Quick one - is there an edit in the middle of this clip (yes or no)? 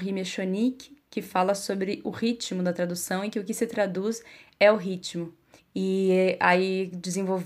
yes